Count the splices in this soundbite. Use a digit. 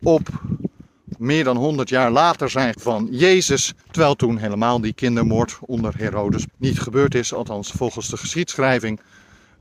3